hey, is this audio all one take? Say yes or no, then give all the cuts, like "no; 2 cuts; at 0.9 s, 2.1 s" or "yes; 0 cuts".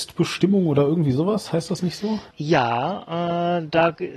no; 1 cut; at 2.3 s